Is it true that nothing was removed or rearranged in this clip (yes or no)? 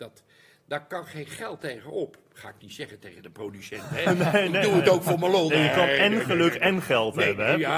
no